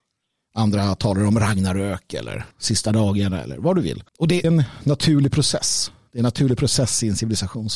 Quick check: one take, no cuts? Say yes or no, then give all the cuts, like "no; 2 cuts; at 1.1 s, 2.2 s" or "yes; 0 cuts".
no; 3 cuts; at 2.5 s, 4.1 s, 4.4 s